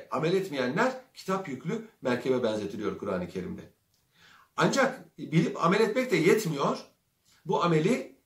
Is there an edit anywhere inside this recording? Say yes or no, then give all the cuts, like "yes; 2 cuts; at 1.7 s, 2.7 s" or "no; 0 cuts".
no; 0 cuts